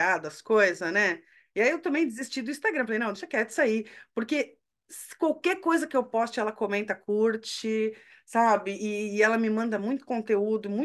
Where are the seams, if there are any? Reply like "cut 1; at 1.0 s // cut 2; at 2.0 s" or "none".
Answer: none

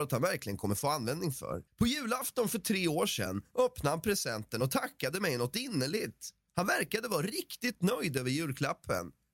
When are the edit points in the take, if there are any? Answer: cut 1; at 1.7 s

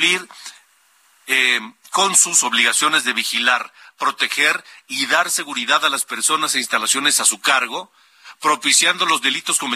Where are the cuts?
none

